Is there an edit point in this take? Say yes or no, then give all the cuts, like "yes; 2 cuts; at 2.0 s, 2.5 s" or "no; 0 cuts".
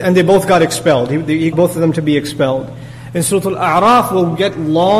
yes; 1 cut; at 1.5 s